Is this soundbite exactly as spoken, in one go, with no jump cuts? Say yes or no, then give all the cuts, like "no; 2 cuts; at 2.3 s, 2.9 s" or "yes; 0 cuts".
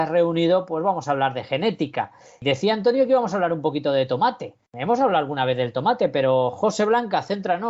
no; 1 cut; at 4.6 s